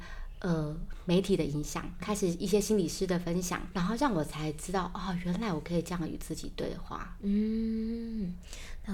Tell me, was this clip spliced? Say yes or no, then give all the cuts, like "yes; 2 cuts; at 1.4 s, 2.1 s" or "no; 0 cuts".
yes; 2 cuts; at 2.0 s, 3.7 s